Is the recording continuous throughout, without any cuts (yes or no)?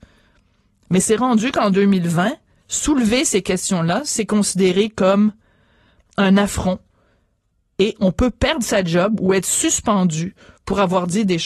yes